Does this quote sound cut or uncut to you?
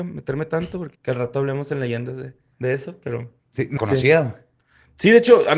cut